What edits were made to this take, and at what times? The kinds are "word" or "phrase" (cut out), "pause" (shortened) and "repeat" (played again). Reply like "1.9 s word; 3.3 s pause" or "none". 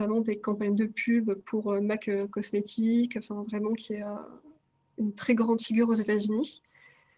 none